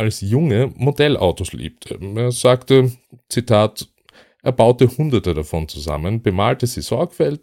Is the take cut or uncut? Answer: uncut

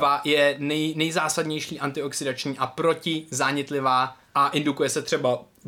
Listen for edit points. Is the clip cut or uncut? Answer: cut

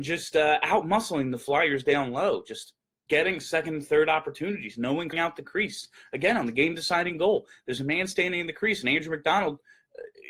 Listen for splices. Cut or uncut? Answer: cut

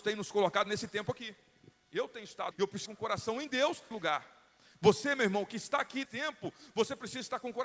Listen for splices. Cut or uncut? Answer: cut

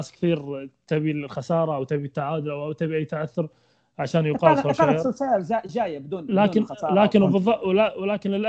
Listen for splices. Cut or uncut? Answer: uncut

